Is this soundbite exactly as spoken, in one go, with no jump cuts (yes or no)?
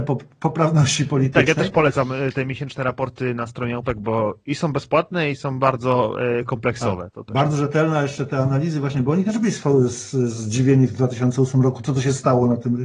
yes